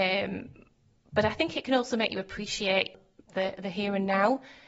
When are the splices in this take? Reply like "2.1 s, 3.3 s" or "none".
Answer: none